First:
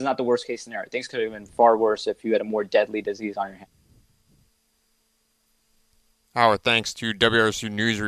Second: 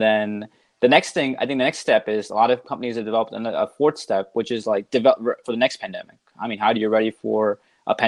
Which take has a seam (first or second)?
second